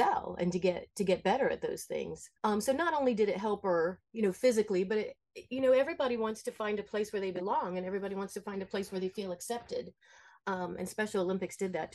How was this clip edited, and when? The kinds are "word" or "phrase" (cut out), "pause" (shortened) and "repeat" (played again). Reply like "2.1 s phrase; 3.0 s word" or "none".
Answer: 2.4 s pause

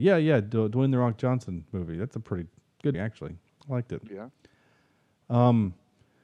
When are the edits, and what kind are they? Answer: 2.9 s word

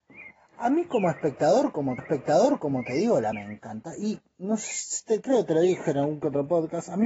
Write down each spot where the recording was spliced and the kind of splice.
2.0 s repeat; 3.3 s word

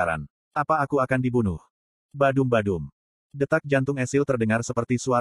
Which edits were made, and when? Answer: none

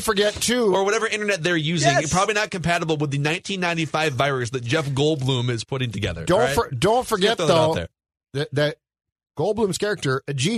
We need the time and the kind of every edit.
none

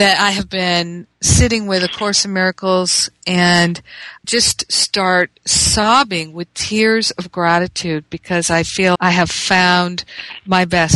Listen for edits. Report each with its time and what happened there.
4.2 s word; 9.0 s word

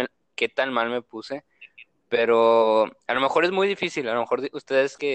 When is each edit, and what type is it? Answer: none

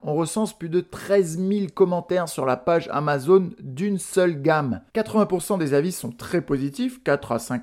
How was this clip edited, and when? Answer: 4.9 s pause

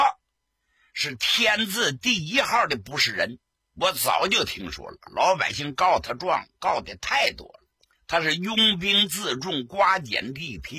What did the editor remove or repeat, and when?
3.5 s pause; 7.9 s pause

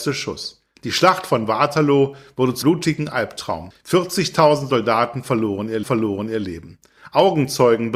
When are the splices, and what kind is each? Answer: 2.6 s word; 5.8 s repeat

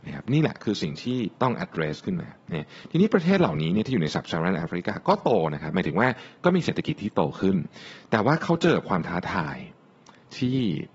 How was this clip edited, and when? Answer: 1.3 s pause

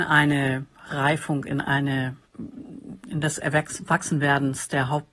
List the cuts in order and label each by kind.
2.3 s pause

